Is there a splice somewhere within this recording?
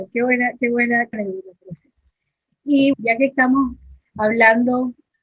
yes; 2 cuts; at 1.1 s, 2.9 s

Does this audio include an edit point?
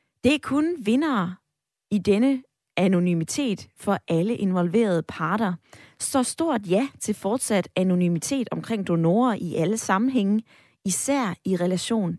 no; 0 cuts

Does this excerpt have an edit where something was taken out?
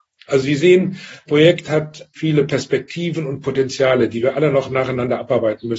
yes; 2 cuts; at 1.3 s, 2.2 s

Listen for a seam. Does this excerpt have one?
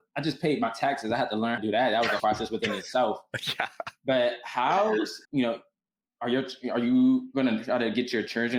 yes; 3 cuts; at 1.6 s, 2.2 s, 5.2 s

